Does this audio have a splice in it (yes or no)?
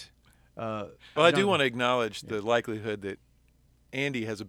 yes